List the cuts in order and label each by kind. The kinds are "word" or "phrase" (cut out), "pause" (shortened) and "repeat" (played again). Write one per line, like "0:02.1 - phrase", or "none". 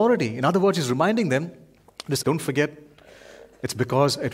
0:02.2 - phrase